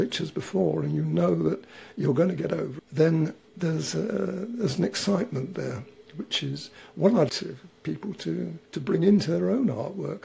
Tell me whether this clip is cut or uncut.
cut